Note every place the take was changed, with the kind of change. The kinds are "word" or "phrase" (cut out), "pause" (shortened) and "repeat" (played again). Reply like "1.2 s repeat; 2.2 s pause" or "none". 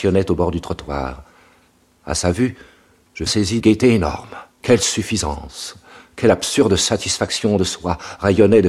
3.3 s phrase; 3.6 s word; 4.5 s pause

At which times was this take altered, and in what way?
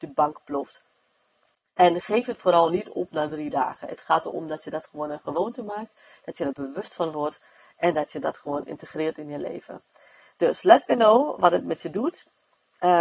none

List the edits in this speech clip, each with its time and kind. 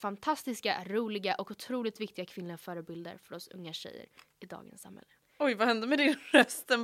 5.2 s pause

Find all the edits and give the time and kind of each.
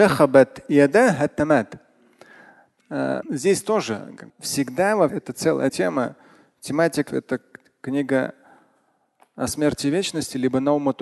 2.8 s word; 3.2 s word; 4.3 s word; 5.1 s word; 5.7 s word; 7.1 s word

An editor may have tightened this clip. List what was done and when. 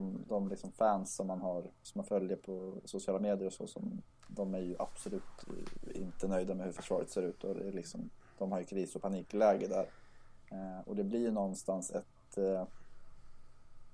1.7 s pause; 4.1 s pause

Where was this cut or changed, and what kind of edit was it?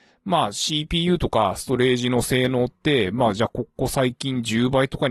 none

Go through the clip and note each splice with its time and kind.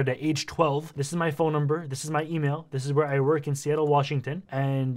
none

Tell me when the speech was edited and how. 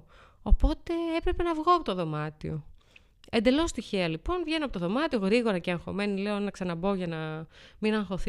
none

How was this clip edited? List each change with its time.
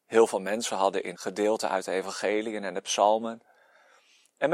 1.1 s word

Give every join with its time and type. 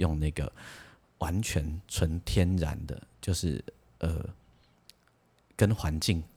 none

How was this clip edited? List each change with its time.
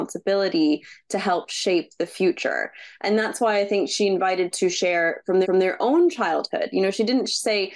4.5 s word; 5.4 s repeat

